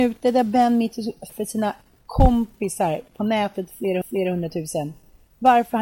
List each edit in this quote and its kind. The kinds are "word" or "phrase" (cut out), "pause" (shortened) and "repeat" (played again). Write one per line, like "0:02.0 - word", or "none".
0:01.3 - word
0:04.0 - repeat